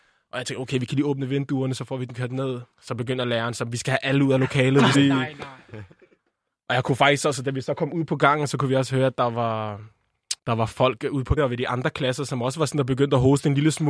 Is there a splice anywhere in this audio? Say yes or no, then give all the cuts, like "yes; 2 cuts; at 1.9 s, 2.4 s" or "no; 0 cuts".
yes; 4 cuts; at 2.7 s, 4.9 s, 10.4 s, 11.4 s